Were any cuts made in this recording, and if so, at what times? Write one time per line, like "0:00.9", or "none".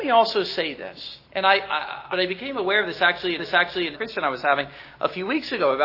0:01.2
0:02.1
0:03.4
0:03.9